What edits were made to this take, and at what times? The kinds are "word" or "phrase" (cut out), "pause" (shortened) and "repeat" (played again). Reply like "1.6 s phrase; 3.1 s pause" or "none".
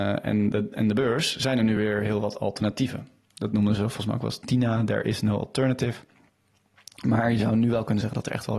none